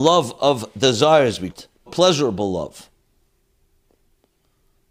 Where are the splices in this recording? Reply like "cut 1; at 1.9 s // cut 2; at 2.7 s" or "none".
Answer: cut 1; at 1.5 s // cut 2; at 1.9 s